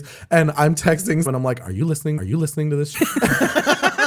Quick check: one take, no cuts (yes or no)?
no